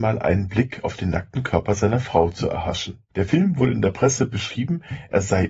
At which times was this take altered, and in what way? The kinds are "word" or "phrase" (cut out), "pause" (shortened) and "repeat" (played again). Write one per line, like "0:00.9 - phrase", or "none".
0:03.1 - pause